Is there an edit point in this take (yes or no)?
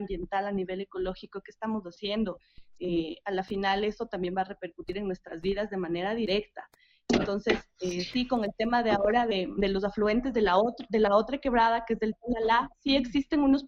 no